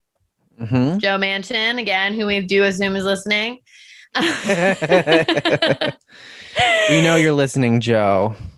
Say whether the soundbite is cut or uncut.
uncut